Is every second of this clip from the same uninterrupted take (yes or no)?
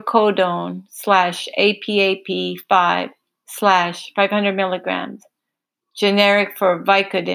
yes